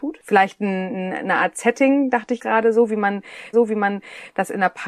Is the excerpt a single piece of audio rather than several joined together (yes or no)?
no